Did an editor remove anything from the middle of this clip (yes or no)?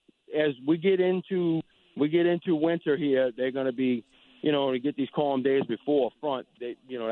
no